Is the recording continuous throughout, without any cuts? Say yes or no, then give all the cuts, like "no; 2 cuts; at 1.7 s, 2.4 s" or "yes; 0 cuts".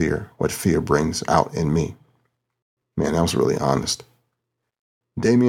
yes; 0 cuts